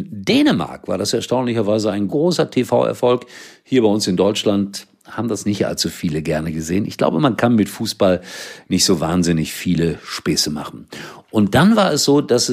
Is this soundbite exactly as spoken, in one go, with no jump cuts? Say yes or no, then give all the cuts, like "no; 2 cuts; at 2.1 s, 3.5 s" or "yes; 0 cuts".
no; 1 cut; at 2.1 s